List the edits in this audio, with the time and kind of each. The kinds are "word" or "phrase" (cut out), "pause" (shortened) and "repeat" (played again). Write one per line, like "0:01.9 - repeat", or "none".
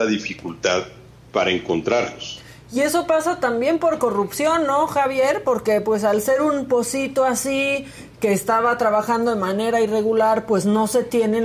none